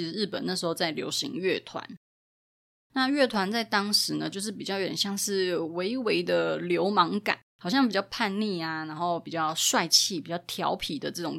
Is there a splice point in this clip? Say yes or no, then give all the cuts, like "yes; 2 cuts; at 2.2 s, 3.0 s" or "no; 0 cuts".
yes; 1 cut; at 7.5 s